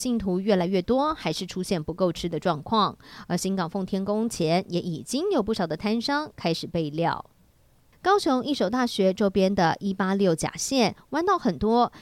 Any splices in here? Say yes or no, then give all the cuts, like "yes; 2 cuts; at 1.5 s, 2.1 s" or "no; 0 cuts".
no; 0 cuts